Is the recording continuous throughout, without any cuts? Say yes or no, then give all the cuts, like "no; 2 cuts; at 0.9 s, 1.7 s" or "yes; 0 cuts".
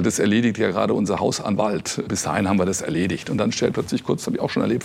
no; 1 cut; at 3.7 s